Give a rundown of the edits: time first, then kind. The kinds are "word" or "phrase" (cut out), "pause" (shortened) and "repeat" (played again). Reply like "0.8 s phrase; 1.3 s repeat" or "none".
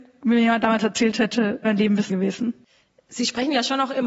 1.6 s word; 2.1 s word

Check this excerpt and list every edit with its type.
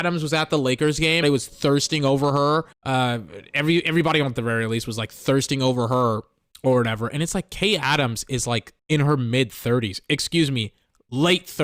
1.2 s phrase; 2.7 s pause; 4.4 s phrase; 6.5 s pause; 8.8 s pause

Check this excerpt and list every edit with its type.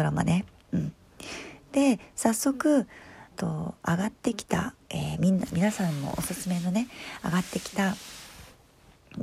3.3 s phrase; 4.8 s pause

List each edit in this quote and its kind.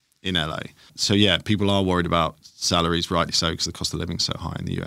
none

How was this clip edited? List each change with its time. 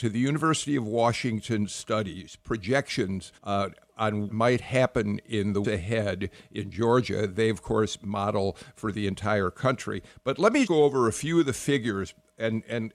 3.4 s pause; 4.3 s word; 5.6 s word; 10.7 s word

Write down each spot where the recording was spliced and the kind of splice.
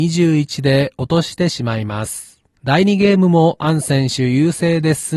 2.5 s pause

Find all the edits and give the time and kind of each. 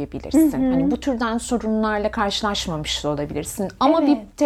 none

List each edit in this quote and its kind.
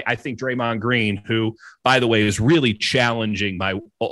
none

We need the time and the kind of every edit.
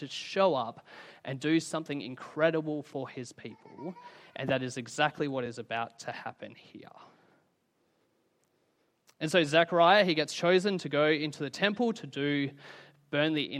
none

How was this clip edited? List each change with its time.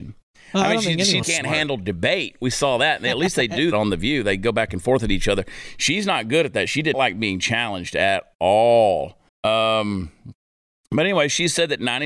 1.2 s word; 3.7 s word; 6.9 s word; 9.3 s pause

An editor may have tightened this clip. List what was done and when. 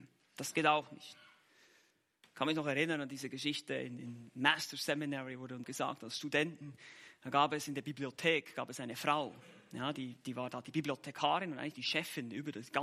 5.6 s word

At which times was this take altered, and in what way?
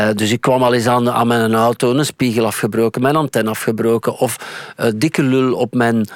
none

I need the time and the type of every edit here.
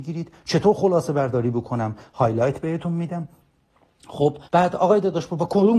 4.4 s pause

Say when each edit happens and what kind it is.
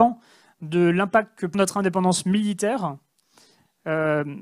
1.5 s phrase

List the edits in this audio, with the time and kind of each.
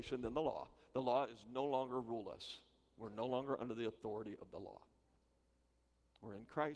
none

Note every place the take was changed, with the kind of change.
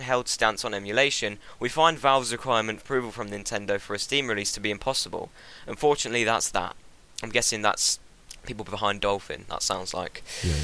2.8 s phrase

